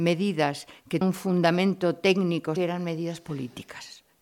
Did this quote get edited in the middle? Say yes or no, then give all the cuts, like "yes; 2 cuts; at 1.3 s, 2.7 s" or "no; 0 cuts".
yes; 2 cuts; at 1.0 s, 2.6 s